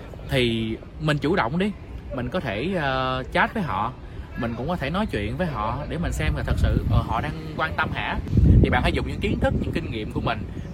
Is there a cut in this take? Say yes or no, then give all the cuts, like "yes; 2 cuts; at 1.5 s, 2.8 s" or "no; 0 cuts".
no; 0 cuts